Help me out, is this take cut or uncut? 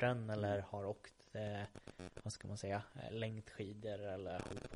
uncut